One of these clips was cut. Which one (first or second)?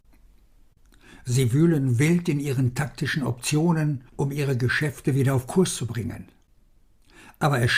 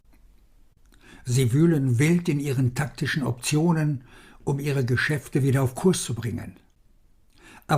first